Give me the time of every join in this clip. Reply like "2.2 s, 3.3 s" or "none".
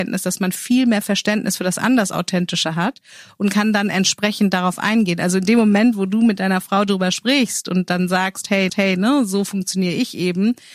8.7 s